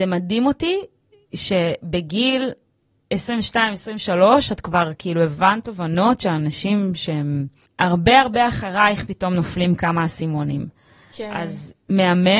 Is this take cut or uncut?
cut